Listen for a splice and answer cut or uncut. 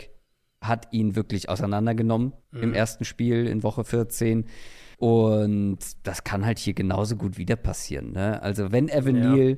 cut